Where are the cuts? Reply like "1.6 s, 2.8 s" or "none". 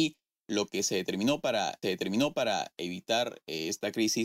1.8 s